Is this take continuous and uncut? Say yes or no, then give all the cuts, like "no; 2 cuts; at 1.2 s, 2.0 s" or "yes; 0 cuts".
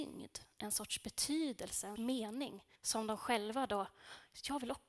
no; 2 cuts; at 2.0 s, 2.8 s